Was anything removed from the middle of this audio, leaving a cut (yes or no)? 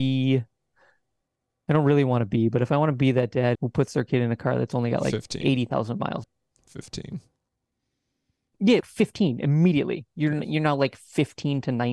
yes